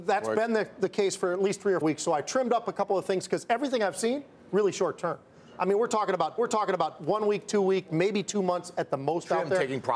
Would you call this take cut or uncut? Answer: cut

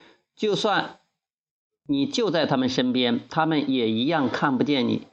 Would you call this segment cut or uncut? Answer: uncut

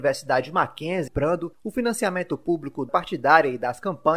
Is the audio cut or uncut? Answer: cut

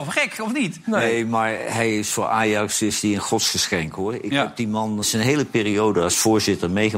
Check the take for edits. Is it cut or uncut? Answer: cut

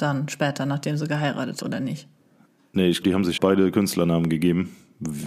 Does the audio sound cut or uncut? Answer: cut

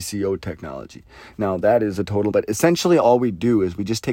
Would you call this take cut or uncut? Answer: cut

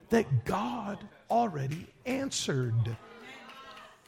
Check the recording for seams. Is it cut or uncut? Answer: uncut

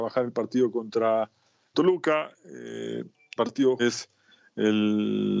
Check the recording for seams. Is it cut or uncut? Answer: cut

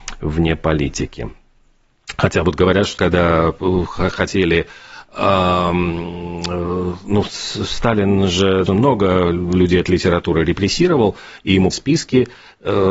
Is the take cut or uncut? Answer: cut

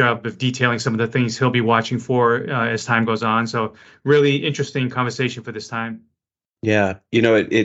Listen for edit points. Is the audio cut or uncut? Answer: uncut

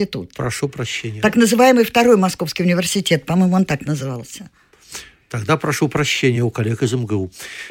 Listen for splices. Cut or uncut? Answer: uncut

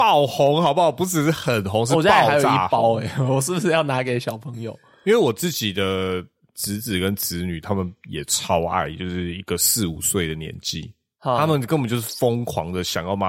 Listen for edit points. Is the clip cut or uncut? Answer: uncut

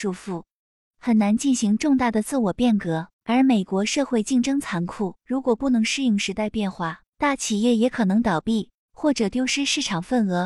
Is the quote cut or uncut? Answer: cut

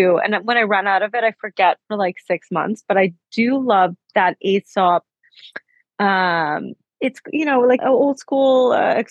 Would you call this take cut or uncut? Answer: cut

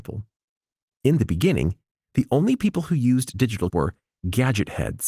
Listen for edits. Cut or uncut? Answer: cut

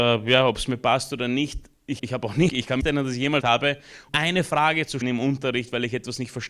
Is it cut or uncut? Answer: cut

